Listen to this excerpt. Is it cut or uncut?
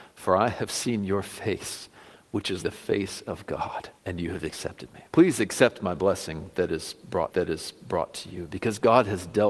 cut